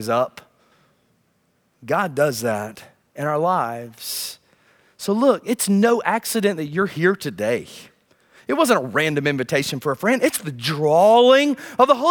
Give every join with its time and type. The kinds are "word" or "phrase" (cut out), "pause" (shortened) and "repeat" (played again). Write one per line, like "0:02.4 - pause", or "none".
none

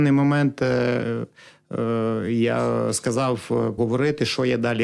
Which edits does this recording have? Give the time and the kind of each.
0:03.8 - word

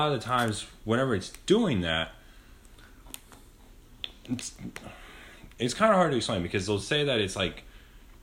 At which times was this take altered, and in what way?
none

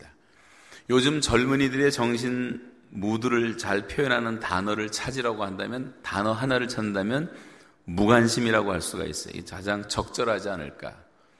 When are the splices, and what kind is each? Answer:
none

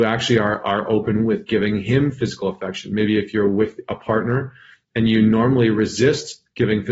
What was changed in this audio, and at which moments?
none

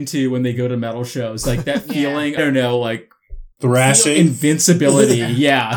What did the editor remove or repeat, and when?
0:02.4 - phrase
0:03.5 - pause

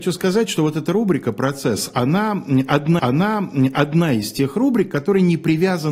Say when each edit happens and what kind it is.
0:03.0 - repeat

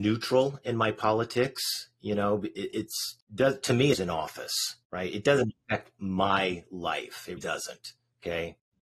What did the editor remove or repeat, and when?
0:03.2 - pause
0:03.9 - phrase
0:04.8 - pause
0:07.4 - word

